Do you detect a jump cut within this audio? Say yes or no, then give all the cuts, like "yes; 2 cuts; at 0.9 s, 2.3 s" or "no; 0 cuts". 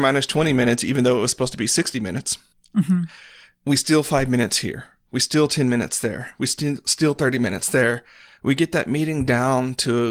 yes; 1 cut; at 2.5 s